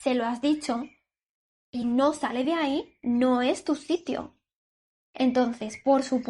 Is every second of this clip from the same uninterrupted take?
yes; 0 cuts

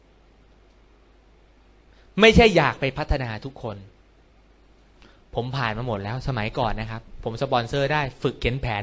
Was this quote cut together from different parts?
no; 0 cuts

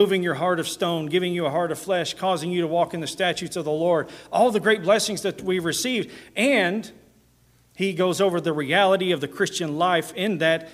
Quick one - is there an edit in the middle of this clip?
no; 0 cuts

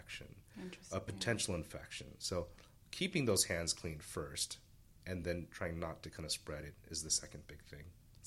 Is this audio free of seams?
yes; 0 cuts

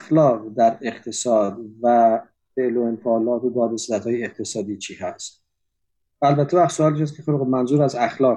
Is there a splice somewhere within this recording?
no; 0 cuts

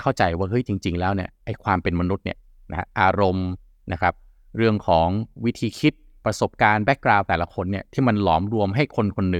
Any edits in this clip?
no; 0 cuts

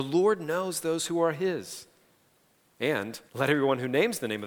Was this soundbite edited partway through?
yes; 1 cut; at 3.3 s

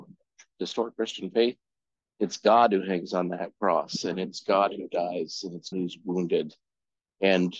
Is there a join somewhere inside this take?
yes; 1 cut; at 5.7 s

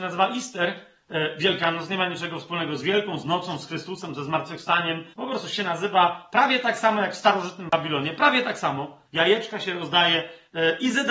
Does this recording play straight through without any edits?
no; 2 cuts; at 5.1 s, 9.1 s

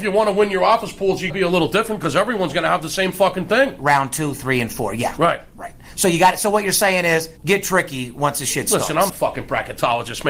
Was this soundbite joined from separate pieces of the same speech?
yes; 3 cuts; at 1.3 s, 7.4 s, 9.1 s

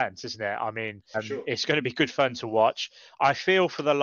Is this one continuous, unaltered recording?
no; 1 cut; at 1.1 s

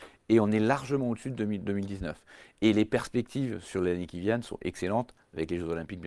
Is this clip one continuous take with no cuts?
yes; 0 cuts

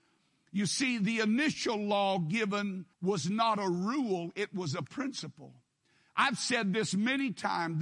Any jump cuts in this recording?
yes; 1 cut; at 2.9 s

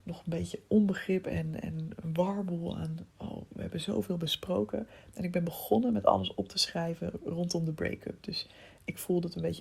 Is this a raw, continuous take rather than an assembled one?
yes; 0 cuts

